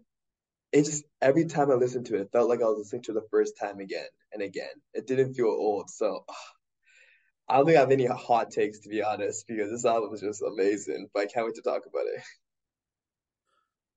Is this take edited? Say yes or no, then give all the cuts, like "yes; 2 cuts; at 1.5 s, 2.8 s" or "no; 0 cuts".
no; 0 cuts